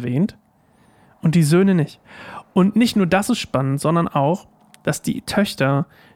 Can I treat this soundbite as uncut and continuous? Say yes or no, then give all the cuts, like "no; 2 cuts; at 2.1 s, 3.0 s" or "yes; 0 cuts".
yes; 0 cuts